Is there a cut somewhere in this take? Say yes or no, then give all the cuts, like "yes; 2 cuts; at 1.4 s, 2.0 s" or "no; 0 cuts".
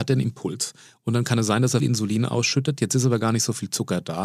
yes; 1 cut; at 1.8 s